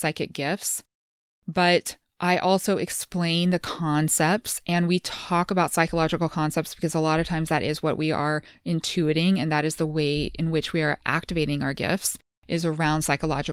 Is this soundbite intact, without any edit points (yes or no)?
yes